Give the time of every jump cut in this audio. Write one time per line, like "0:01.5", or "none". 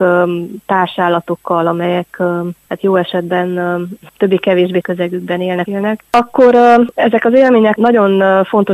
0:02.6
0:04.8
0:05.7